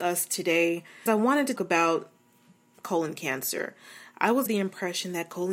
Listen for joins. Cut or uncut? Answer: cut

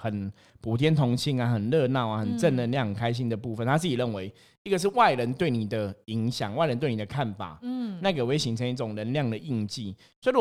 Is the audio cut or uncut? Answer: uncut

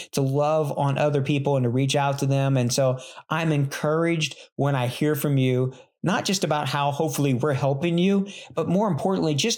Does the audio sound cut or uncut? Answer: uncut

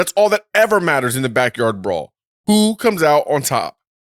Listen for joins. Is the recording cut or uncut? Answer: uncut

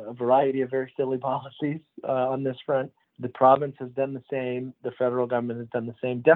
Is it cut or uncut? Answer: cut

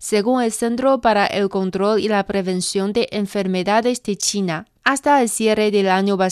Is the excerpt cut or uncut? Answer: cut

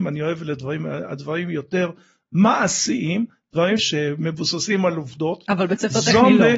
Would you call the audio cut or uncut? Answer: cut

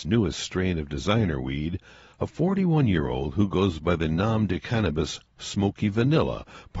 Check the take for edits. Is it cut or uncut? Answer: uncut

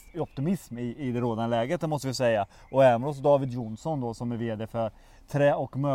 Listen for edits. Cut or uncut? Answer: uncut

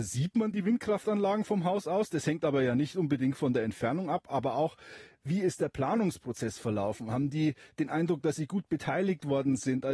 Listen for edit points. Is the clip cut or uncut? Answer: uncut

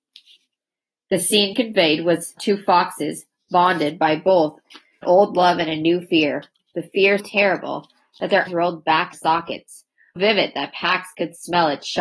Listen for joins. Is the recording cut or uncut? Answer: cut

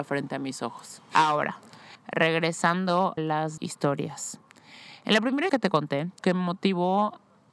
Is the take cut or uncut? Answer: cut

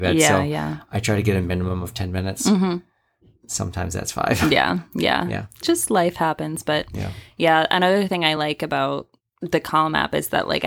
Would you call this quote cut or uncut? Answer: uncut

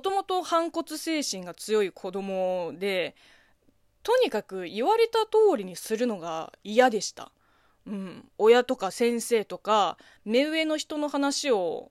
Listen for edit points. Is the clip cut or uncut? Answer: cut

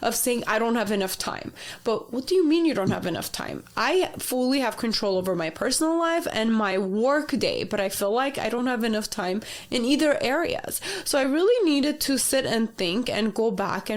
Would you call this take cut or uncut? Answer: uncut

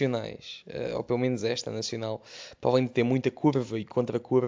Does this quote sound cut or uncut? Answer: uncut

